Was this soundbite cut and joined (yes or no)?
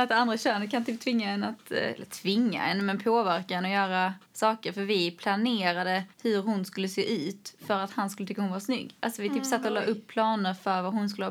yes